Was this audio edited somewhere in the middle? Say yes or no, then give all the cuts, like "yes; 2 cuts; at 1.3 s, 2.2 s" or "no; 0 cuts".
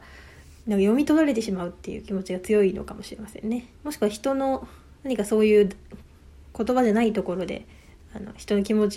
yes; 1 cut; at 3.7 s